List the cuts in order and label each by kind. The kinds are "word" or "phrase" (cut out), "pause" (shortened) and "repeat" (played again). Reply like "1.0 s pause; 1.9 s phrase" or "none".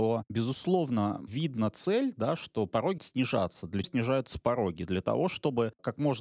3.0 s word; 3.8 s word